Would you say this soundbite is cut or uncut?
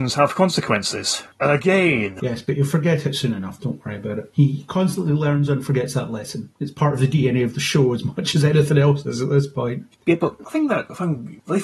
uncut